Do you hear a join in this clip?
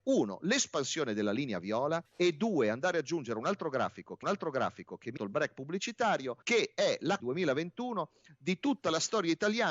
yes; 5 cuts; at 2.0 s, 4.2 s, 5.2 s, 6.4 s, 7.2 s

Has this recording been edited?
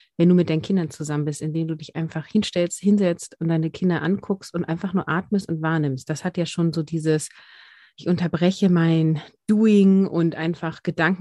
no; 0 cuts

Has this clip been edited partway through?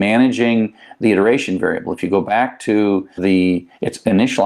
yes; 1 cut; at 3.2 s

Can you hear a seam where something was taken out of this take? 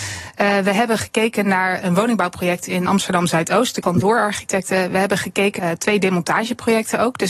yes; 3 cuts; at 2.9 s, 3.8 s, 5.6 s

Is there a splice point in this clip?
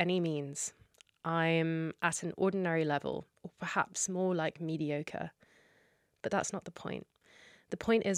no; 0 cuts

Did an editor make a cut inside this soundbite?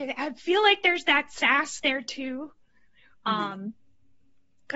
no; 0 cuts

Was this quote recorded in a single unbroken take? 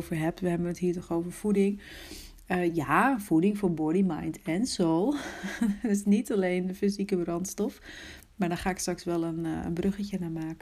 yes; 0 cuts

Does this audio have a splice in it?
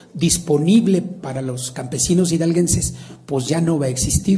no; 0 cuts

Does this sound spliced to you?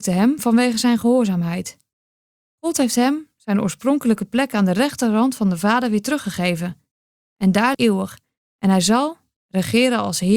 yes; 1 cut; at 7.7 s

